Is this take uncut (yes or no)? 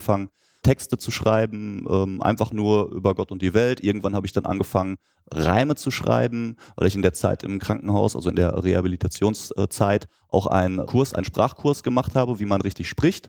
yes